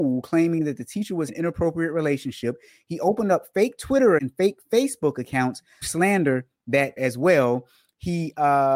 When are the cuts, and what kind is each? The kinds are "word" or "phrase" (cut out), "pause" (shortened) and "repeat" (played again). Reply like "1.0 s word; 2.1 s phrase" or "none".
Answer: 1.3 s word; 4.2 s word; 5.8 s word; 7.0 s word